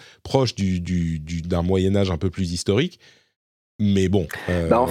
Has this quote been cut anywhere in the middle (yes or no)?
no